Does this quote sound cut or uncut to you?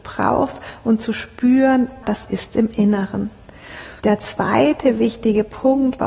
cut